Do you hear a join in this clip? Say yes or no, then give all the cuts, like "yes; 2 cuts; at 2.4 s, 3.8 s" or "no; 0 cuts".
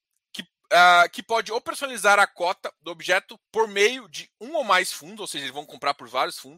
yes; 1 cut; at 3.5 s